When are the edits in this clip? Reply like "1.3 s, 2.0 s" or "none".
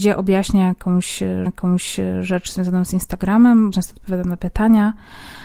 1.5 s, 3.7 s